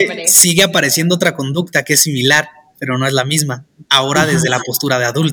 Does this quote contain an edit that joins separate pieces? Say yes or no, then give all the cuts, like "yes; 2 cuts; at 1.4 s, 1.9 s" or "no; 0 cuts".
no; 0 cuts